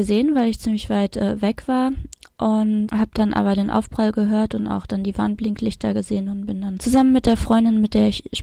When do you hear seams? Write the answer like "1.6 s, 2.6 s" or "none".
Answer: 2.9 s, 6.8 s

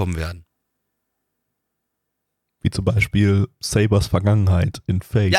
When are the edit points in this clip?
none

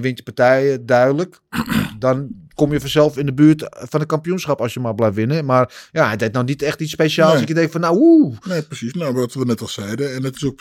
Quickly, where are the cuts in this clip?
none

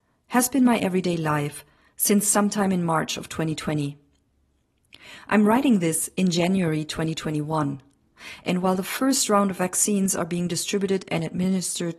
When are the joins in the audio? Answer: none

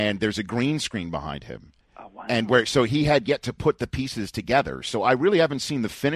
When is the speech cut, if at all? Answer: none

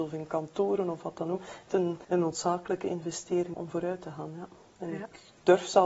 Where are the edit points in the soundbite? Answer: 1.7 s, 2.0 s, 3.5 s

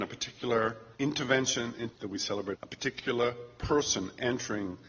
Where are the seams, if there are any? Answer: 0.9 s, 1.9 s, 2.5 s

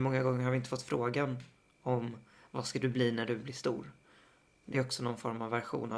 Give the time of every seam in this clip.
none

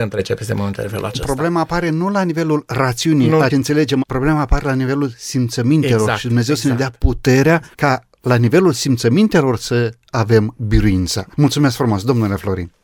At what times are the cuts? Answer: 3.5 s, 7.7 s, 11.3 s

